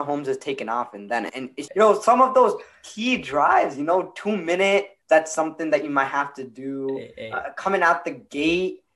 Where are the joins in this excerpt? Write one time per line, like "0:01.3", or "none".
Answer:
0:01.3
0:01.7
0:05.0